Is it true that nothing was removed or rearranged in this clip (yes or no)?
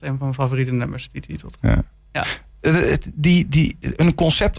yes